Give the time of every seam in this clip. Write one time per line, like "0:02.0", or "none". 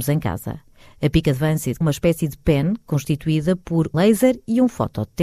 0:01.8
0:03.9

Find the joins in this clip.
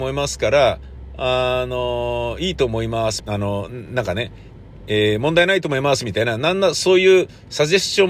0:03.2

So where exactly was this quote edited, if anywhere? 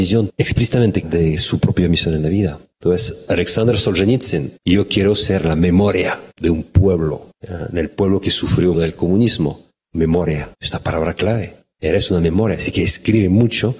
0:01.0
0:04.6
0:06.3
0:07.3
0:08.7
0:10.5

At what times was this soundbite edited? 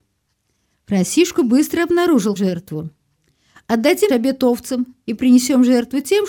0:02.4
0:04.1

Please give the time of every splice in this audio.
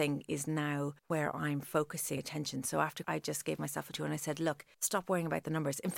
0:01.0
0:02.2
0:03.0
0:03.9
0:04.7

